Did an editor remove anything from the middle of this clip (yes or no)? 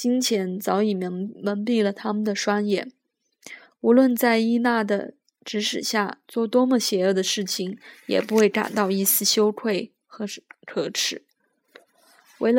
no